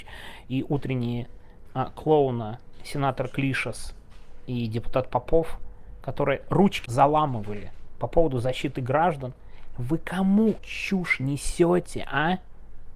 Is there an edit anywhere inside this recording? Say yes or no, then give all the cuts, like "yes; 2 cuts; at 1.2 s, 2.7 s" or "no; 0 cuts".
yes; 3 cuts; at 1.7 s, 6.9 s, 10.6 s